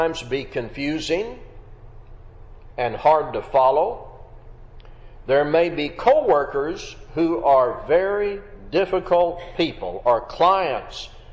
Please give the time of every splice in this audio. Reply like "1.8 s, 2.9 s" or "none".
none

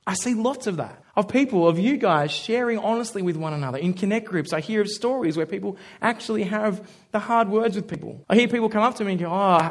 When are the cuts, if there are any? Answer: 1.0 s, 8.2 s

